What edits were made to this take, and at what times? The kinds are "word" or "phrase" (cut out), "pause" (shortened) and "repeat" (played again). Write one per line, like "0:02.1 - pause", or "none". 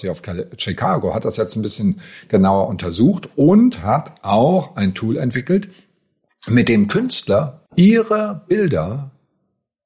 0:07.7 - pause